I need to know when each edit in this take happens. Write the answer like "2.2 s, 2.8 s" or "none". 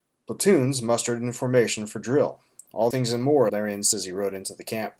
2.9 s, 3.5 s, 3.9 s